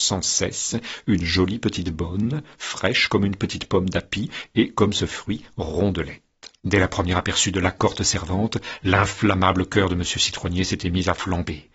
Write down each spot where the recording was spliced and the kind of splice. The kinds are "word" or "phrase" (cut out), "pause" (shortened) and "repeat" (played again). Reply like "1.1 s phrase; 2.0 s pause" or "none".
6.6 s pause